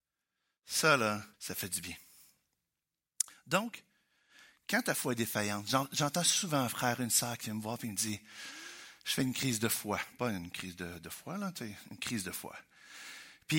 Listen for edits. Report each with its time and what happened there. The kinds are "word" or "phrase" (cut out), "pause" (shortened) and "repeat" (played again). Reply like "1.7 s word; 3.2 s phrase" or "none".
1.3 s pause